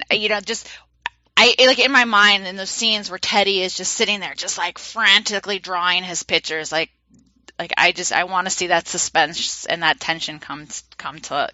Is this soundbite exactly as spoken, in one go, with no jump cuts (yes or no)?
yes